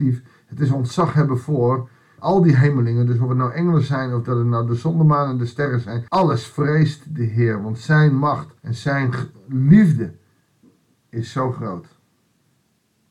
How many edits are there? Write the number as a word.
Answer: three